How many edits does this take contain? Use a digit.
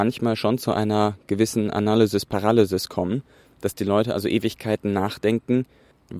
0